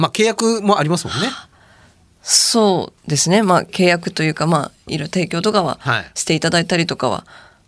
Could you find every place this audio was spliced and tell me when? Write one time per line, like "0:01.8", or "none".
0:03.0